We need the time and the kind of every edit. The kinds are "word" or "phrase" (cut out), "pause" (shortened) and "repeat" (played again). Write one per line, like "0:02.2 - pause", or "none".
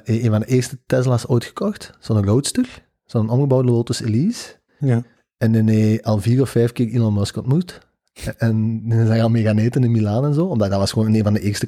0:04.7 - pause